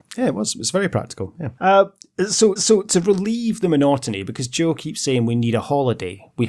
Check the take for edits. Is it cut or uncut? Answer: cut